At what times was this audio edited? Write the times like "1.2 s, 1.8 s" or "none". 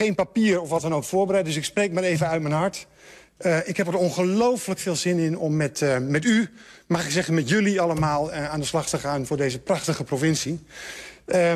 none